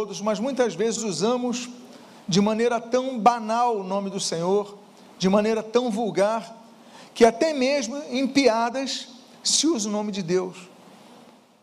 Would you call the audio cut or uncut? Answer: cut